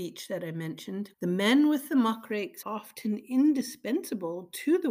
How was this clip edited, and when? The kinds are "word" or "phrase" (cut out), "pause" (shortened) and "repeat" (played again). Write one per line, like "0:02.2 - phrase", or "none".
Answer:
0:01.1 - word
0:02.6 - word